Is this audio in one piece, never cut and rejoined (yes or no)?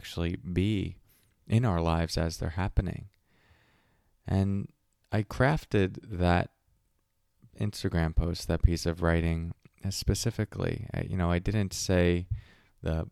yes